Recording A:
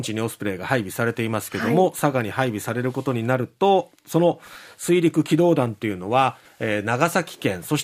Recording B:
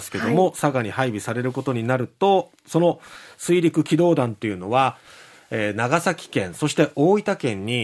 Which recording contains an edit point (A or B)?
A